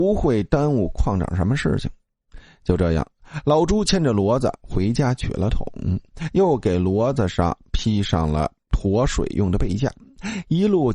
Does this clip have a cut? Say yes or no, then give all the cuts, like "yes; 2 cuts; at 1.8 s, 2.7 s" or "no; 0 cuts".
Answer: yes; 1 cut; at 8.6 s